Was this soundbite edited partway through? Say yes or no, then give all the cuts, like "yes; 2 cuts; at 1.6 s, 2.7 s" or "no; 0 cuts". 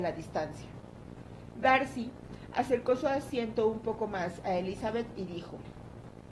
no; 0 cuts